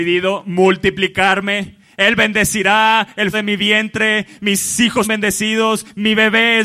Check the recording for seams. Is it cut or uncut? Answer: cut